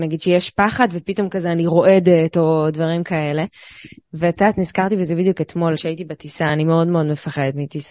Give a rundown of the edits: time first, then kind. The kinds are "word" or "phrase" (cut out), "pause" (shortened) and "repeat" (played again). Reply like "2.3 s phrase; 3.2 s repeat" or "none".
none